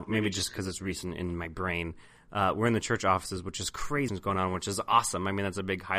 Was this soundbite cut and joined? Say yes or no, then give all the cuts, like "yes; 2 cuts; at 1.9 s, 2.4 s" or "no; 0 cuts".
yes; 1 cut; at 4.1 s